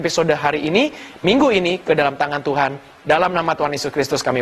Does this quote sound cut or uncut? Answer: uncut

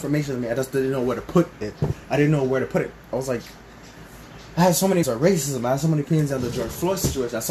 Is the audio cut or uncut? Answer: cut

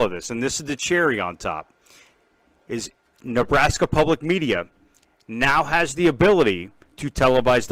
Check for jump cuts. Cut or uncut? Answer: uncut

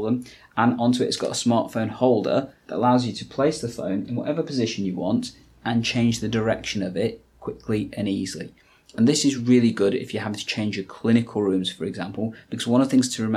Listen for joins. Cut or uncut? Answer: uncut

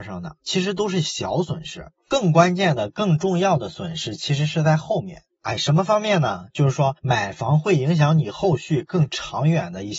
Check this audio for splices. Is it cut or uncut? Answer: uncut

